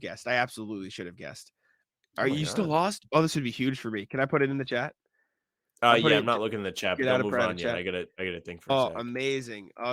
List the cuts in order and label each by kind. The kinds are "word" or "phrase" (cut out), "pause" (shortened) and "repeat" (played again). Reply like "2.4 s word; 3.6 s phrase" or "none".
none